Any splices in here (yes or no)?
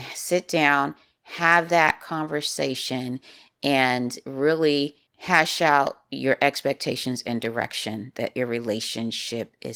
yes